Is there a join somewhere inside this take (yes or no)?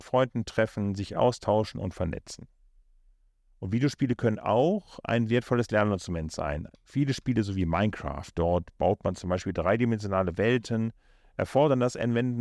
no